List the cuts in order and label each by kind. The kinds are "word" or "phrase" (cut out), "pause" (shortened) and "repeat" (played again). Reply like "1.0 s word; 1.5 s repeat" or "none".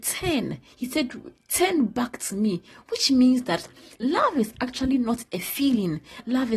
none